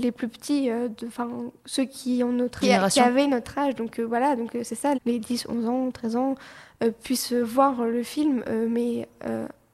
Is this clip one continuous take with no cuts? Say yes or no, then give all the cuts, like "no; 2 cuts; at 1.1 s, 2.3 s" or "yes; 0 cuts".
no; 2 cuts; at 2.6 s, 4.9 s